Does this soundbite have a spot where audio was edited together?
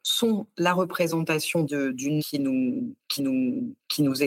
yes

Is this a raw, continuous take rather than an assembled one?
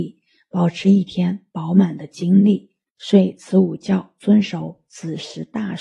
yes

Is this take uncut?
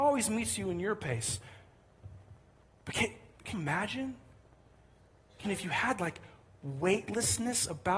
no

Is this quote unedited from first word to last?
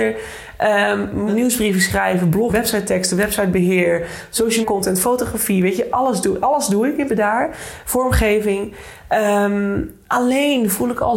no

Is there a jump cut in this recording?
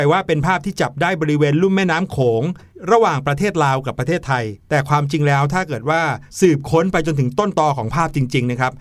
yes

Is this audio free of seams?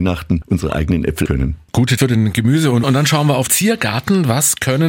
no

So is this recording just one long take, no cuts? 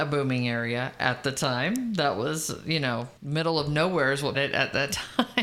no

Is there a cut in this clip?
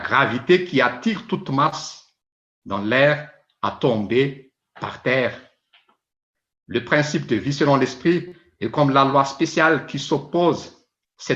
no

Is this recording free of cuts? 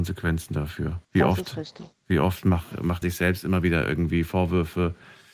no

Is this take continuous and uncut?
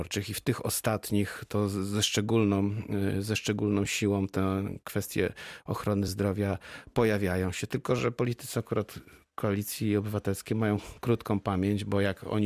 yes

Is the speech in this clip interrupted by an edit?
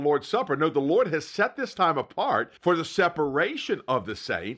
yes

